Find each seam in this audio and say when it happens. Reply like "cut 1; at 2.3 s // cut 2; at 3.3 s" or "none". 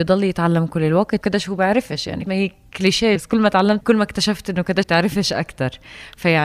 cut 1; at 1.2 s // cut 2; at 2.3 s // cut 3; at 3.2 s // cut 4; at 3.8 s // cut 5; at 4.8 s